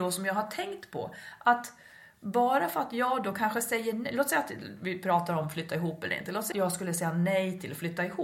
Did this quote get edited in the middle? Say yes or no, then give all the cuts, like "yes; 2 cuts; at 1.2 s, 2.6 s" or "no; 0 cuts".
yes; 1 cut; at 6.5 s